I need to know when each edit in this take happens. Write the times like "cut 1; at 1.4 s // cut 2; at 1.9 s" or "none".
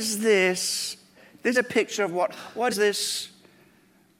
cut 1; at 1.5 s // cut 2; at 2.7 s